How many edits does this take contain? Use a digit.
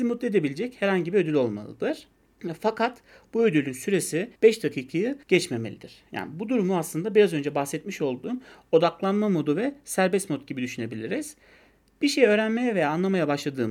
2